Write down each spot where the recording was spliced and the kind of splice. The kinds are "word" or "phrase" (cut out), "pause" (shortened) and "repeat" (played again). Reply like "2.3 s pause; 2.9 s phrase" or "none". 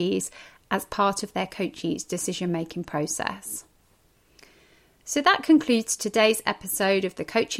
none